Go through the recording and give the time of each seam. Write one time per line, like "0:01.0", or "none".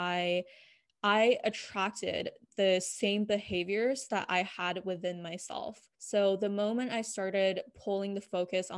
0:05.9